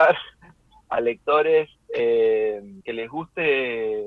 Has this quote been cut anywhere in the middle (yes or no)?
yes